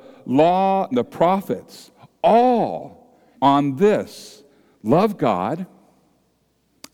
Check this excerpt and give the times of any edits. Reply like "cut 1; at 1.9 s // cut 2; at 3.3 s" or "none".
cut 1; at 0.9 s // cut 2; at 3.3 s